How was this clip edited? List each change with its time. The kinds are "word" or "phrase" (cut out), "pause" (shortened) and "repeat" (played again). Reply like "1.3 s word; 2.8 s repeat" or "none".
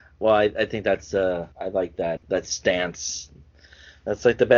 1.5 s pause; 2.2 s word